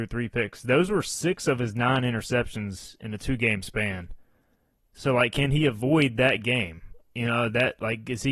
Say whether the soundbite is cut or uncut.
uncut